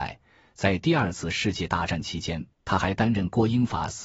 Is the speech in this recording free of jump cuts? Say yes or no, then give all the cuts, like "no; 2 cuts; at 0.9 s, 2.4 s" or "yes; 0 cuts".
no; 1 cut; at 2.5 s